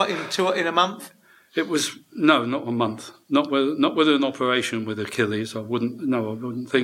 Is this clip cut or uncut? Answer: uncut